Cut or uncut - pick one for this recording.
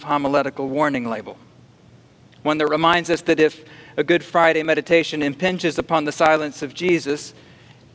uncut